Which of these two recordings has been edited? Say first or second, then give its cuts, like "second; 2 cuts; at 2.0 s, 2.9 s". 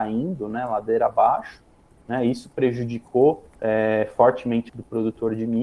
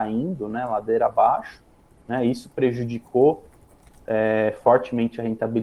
first; 2 cuts; at 3.5 s, 4.7 s